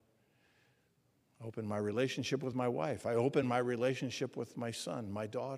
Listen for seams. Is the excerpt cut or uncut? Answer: uncut